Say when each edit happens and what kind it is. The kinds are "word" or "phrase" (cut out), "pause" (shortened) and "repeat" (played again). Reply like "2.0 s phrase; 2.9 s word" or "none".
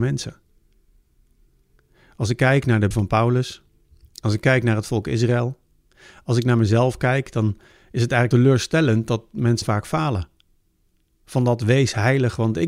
2.9 s word; 8.3 s word; 9.6 s word